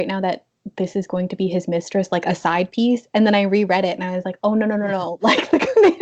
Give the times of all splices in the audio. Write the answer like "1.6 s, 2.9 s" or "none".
none